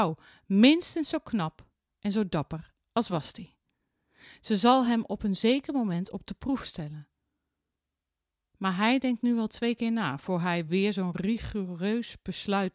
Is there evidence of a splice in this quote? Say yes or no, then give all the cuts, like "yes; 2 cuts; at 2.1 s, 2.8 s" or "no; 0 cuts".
no; 0 cuts